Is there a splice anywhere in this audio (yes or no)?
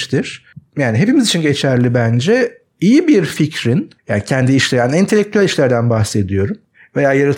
yes